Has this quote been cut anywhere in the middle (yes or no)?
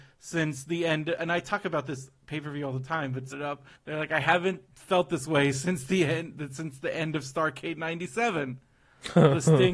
yes